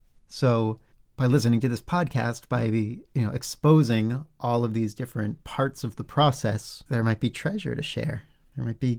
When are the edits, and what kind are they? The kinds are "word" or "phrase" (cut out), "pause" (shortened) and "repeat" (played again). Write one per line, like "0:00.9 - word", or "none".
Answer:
0:03.1 - pause
0:06.9 - pause

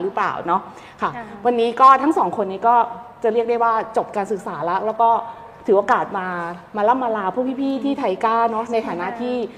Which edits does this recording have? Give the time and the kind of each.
none

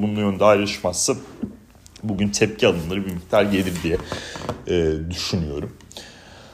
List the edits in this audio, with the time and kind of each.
none

